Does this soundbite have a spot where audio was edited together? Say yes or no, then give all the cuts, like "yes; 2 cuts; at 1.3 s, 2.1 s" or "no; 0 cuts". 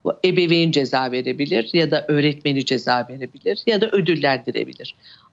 no; 0 cuts